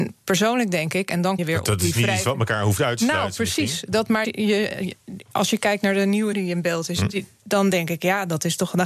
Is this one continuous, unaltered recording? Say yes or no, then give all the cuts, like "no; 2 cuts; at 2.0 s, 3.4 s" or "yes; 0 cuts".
no; 3 cuts; at 1.4 s, 4.2 s, 6.3 s